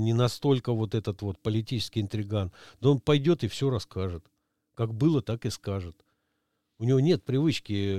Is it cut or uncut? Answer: uncut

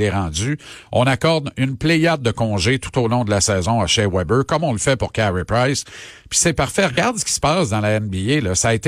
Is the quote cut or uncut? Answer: uncut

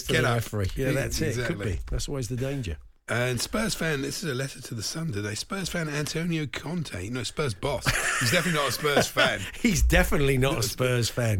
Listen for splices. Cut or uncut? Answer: uncut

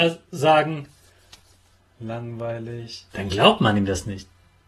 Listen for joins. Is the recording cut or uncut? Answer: cut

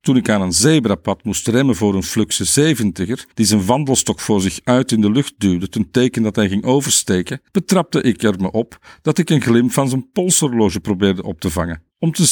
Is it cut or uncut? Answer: cut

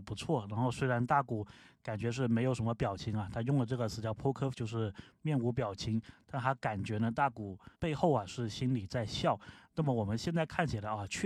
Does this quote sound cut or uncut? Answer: cut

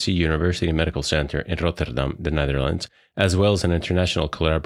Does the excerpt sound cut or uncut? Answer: uncut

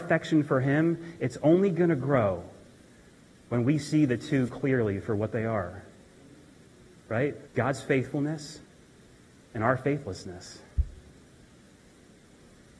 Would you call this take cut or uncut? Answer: cut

